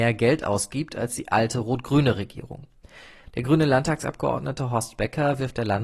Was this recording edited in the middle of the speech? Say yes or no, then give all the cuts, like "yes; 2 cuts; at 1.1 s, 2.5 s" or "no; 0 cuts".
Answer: no; 0 cuts